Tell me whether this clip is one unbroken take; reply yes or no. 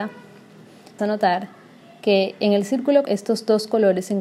no